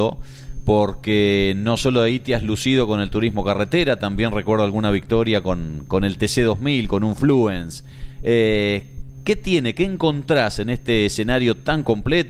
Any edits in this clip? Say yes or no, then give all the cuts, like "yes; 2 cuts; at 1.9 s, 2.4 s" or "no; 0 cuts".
no; 0 cuts